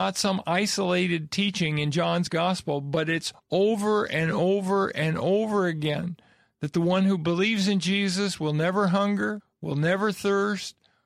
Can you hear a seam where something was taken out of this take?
no; 0 cuts

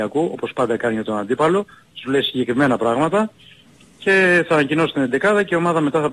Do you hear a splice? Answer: no; 0 cuts

